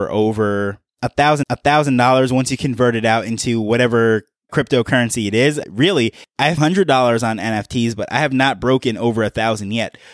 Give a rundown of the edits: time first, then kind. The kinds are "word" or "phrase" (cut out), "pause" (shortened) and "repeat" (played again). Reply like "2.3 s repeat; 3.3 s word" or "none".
1.4 s repeat; 4.5 s word; 6.6 s phrase